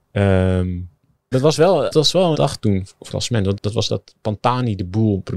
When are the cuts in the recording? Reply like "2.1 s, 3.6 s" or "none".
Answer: 1.3 s, 1.9 s, 2.3 s, 3.1 s, 3.6 s, 3.9 s